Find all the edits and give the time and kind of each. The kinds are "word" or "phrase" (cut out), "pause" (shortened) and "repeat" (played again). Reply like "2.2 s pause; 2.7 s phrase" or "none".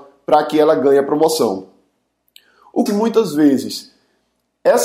2.9 s phrase